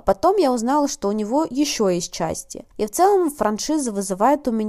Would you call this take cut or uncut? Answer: cut